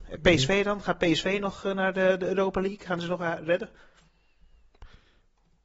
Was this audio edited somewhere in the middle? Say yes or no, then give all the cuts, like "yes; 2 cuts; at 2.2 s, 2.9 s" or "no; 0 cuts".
no; 0 cuts